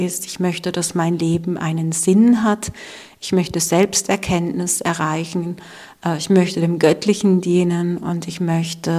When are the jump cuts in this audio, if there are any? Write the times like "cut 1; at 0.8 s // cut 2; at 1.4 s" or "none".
none